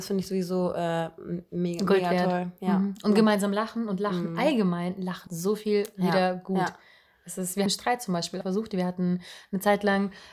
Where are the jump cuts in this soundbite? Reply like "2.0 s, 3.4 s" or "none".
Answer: 5.3 s, 7.7 s, 8.4 s